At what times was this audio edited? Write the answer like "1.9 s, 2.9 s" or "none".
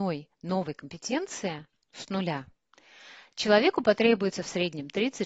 none